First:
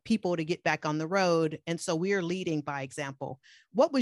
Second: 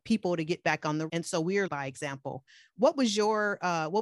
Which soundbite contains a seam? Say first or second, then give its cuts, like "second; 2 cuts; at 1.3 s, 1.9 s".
second; 2 cuts; at 1.1 s, 1.7 s